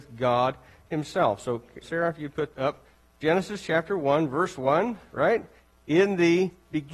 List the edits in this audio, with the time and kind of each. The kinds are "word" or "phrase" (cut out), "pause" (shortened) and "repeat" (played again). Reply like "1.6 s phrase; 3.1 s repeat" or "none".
1.8 s word; 2.5 s word

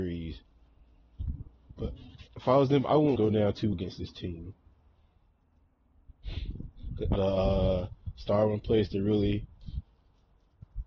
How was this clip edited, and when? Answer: 2.3 s pause; 3.2 s phrase; 3.7 s word; 7.2 s phrase

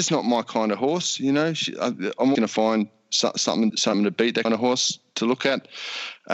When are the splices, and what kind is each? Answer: 2.3 s word; 3.7 s word; 4.4 s word

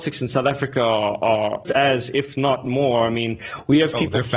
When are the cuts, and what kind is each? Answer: 1.6 s phrase

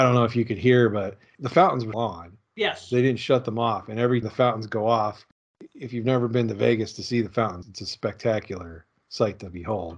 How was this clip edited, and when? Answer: 1.9 s word; 4.2 s word; 7.6 s word

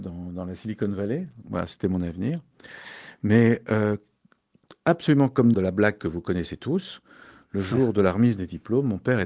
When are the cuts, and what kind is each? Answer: 5.5 s phrase

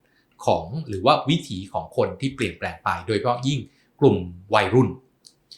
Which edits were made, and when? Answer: none

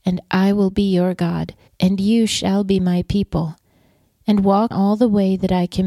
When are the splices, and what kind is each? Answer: 1.7 s pause; 4.7 s word

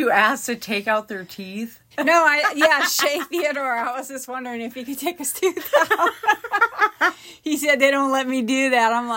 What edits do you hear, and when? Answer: 1.9 s pause

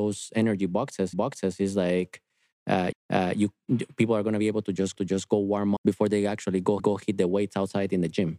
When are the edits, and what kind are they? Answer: 1.1 s repeat; 2.9 s repeat; 5.0 s repeat; 5.8 s word; 6.8 s repeat

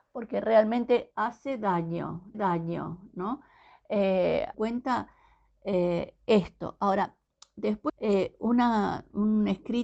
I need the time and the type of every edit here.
1.1 s word; 2.3 s repeat; 4.5 s phrase; 7.9 s phrase

